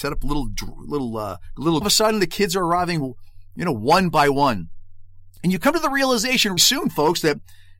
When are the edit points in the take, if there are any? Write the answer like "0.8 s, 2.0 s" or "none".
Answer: 1.8 s, 6.6 s